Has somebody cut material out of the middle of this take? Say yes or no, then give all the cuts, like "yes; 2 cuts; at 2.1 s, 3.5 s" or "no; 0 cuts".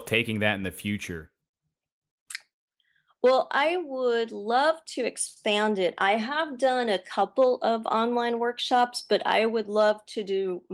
no; 0 cuts